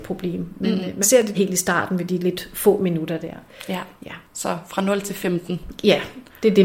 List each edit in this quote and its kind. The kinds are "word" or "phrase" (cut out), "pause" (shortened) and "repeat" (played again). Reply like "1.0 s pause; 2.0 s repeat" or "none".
1.0 s word; 1.3 s phrase; 4.2 s pause